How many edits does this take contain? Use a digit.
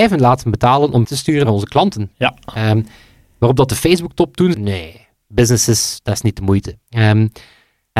4